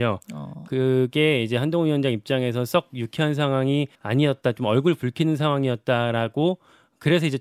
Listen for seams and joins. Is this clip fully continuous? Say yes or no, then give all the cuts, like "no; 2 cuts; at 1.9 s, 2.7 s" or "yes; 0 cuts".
no; 1 cut; at 3.9 s